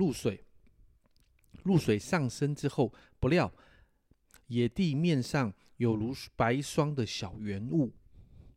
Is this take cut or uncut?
uncut